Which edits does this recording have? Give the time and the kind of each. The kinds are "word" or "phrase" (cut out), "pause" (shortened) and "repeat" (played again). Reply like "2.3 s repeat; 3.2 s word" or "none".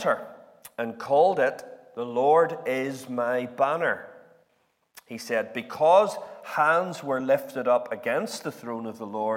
none